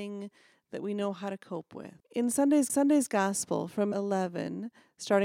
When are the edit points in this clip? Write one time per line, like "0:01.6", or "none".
0:02.0
0:02.7
0:03.9

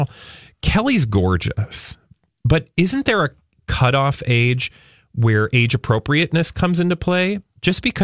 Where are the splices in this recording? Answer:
none

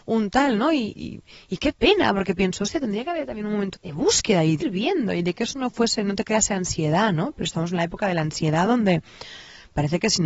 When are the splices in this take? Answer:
0:00.9
0:03.7
0:04.6

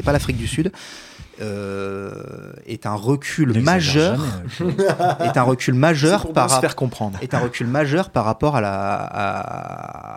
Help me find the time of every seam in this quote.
none

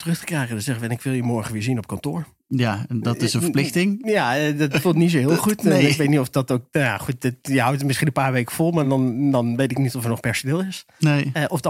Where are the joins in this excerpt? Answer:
none

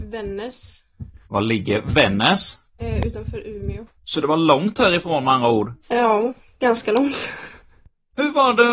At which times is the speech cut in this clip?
0:01.2
0:02.7
0:04.0
0:05.8

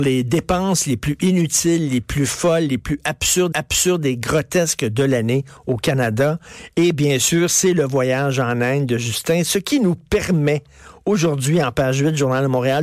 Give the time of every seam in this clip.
0:03.5

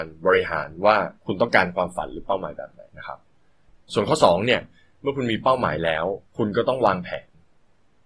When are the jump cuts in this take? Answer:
0:01.2
0:02.9
0:06.3

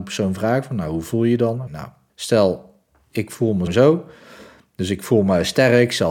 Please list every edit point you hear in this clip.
0:01.7
0:02.1
0:03.7

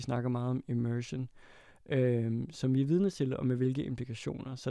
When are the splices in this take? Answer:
none

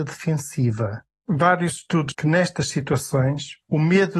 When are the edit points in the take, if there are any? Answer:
0:02.1

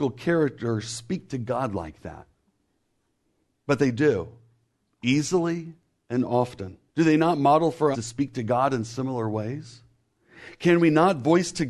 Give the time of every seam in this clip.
0:06.9
0:07.9

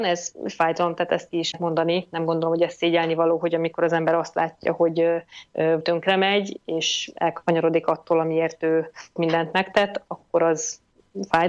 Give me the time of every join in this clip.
0:01.5
0:05.8
0:09.2

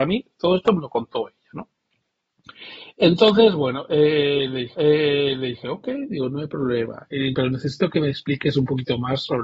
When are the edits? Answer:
0:04.7
0:07.3

